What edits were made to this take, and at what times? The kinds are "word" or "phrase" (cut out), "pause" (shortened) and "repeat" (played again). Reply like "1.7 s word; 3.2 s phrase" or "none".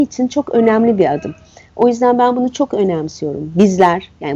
none